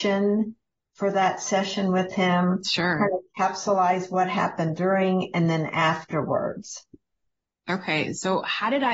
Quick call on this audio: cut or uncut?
uncut